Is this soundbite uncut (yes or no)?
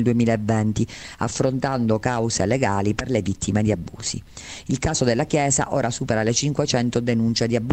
yes